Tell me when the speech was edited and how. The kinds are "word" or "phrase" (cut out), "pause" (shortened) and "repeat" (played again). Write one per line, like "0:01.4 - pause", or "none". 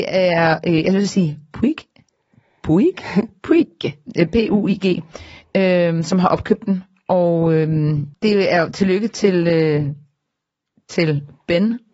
0:08.1 - word